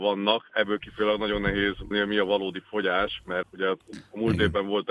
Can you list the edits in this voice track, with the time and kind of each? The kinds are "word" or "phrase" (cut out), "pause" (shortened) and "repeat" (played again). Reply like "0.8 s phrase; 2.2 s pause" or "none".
1.9 s word; 3.4 s word